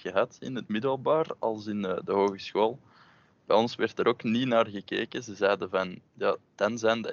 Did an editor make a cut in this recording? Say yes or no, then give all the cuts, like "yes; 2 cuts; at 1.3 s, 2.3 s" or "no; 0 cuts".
no; 0 cuts